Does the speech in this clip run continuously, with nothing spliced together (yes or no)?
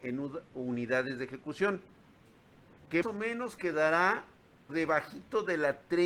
no